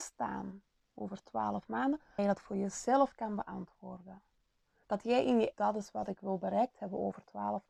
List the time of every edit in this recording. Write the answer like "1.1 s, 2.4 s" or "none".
2.2 s, 5.5 s